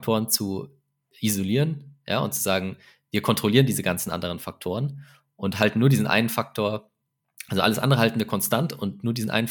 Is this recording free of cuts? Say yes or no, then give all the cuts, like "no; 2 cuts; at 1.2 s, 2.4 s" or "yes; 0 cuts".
yes; 0 cuts